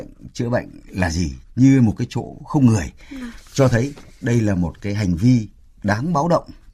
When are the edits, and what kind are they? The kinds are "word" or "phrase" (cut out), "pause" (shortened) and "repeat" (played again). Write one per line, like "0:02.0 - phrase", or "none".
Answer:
none